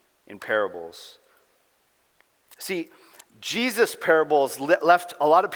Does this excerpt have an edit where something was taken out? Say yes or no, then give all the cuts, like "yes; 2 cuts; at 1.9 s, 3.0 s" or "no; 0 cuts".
no; 0 cuts